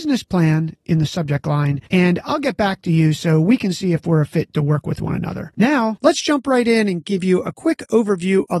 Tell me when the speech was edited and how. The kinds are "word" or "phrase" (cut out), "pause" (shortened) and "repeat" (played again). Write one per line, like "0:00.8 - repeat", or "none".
0:01.9 - pause